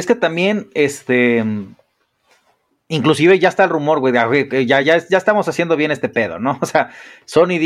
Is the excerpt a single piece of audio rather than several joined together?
yes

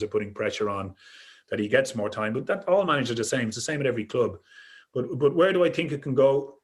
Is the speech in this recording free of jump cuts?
yes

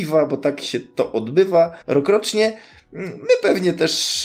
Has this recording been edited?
yes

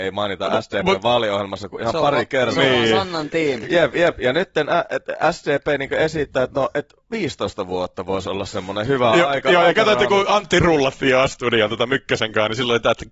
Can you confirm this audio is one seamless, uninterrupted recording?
no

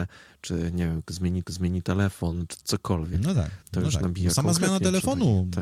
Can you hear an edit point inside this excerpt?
yes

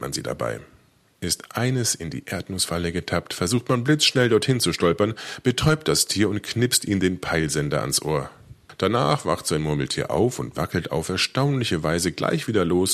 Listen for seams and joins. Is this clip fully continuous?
yes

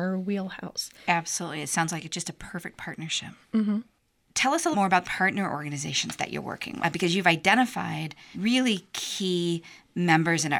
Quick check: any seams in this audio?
yes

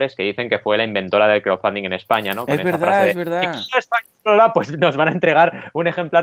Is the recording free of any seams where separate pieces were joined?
yes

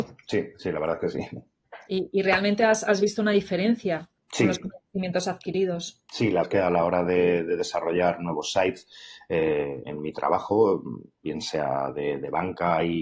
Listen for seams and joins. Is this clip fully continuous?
no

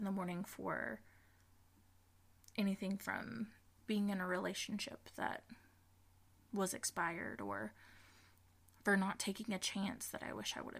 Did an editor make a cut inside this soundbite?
no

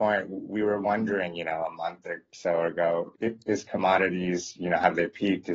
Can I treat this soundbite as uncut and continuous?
no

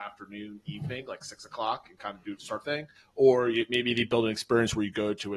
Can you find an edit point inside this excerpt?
yes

